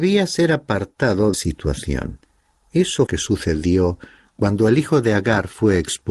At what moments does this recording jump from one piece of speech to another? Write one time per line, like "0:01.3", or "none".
0:01.3
0:03.1